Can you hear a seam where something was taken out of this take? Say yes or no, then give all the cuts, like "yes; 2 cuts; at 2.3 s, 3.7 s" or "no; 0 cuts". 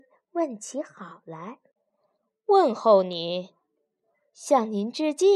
no; 0 cuts